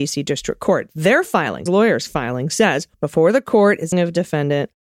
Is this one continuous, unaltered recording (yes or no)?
no